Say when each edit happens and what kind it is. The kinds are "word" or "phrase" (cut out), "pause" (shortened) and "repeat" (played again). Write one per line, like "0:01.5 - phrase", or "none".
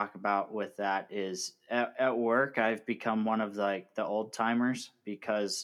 none